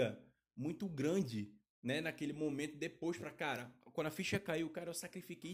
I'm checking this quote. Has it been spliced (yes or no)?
no